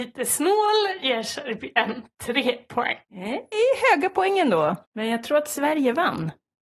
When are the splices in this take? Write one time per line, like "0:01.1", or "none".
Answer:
0:01.0
0:03.0
0:04.8